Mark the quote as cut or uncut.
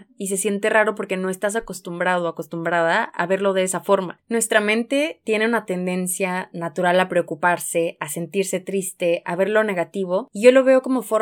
uncut